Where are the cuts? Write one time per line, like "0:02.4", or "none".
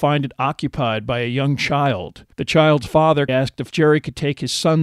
0:02.3
0:03.3
0:03.7